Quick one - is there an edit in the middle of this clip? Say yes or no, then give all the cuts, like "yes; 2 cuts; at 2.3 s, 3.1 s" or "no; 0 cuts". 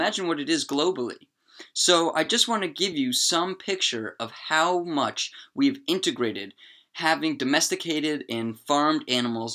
no; 0 cuts